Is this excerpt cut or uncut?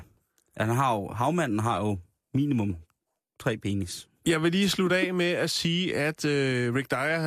uncut